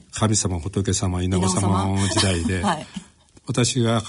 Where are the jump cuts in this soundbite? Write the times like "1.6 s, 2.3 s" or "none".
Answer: none